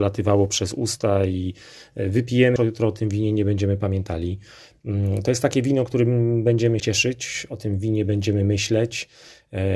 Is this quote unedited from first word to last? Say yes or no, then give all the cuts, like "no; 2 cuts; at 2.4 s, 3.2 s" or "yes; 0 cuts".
no; 2 cuts; at 2.6 s, 6.8 s